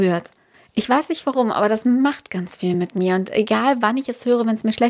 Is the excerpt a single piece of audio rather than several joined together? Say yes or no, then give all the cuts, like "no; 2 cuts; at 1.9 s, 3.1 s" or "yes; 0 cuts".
yes; 0 cuts